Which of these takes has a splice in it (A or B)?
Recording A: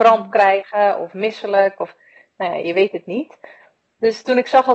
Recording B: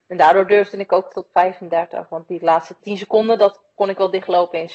B